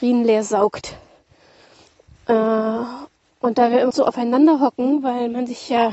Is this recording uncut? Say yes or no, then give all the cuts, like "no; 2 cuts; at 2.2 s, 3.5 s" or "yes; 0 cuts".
no; 1 cut; at 3.9 s